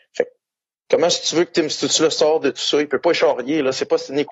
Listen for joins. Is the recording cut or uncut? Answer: uncut